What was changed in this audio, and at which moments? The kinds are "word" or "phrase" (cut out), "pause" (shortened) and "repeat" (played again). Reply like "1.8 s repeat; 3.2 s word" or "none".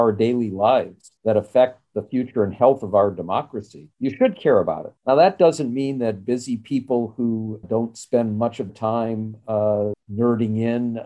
1.2 s pause; 3.9 s pause; 5.0 s pause; 7.6 s word; 8.7 s word; 9.9 s word